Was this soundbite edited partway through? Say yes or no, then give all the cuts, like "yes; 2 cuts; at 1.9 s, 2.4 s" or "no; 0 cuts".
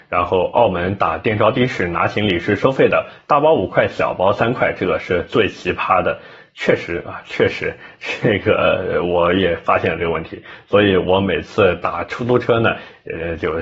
no; 0 cuts